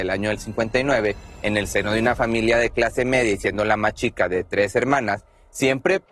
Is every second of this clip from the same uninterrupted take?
yes; 0 cuts

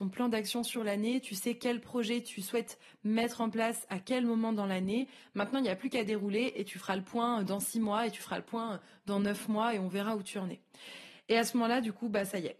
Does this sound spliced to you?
no; 0 cuts

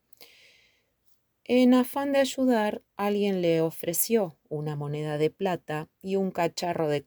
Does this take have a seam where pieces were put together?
yes; 2 cuts; at 2.9 s, 5.9 s

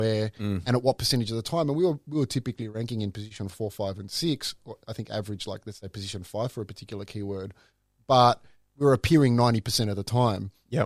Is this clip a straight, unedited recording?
yes; 0 cuts

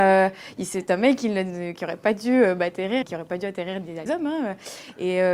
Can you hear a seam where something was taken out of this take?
yes; 3 cuts; at 1.8 s, 3.0 s, 4.1 s

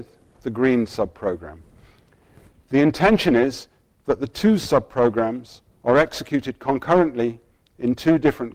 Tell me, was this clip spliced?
no; 0 cuts

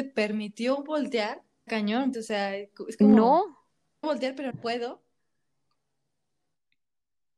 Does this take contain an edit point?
yes; 4 cuts; at 1.7 s, 2.1 s, 4.0 s, 4.5 s

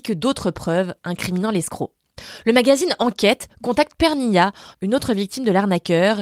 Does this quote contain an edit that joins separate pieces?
no; 0 cuts

